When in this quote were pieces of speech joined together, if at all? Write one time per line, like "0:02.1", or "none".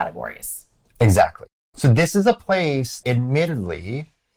0:01.5
0:03.0